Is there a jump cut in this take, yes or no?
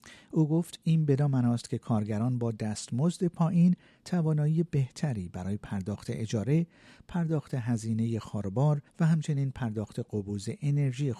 yes